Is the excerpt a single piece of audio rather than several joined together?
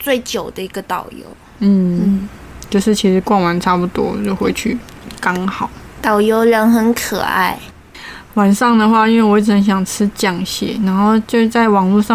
yes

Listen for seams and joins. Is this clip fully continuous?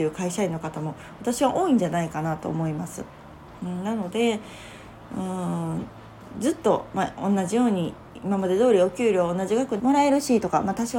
no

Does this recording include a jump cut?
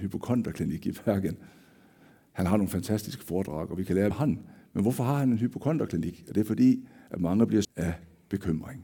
yes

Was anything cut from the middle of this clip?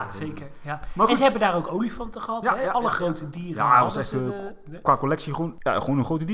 no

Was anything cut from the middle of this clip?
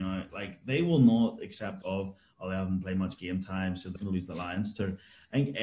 yes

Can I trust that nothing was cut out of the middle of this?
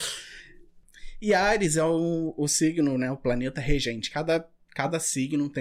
yes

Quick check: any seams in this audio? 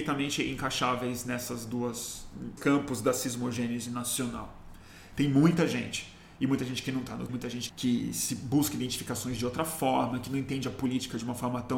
yes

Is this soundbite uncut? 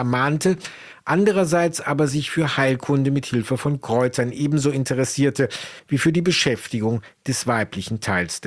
yes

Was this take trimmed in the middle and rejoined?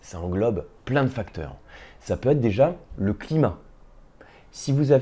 no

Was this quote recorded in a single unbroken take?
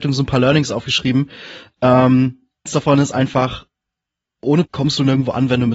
no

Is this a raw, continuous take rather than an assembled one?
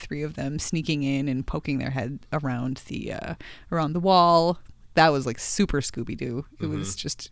yes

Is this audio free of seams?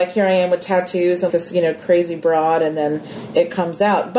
no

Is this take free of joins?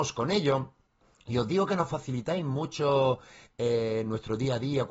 yes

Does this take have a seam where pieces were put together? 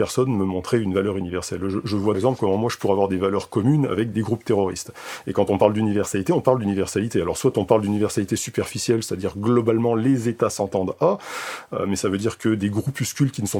yes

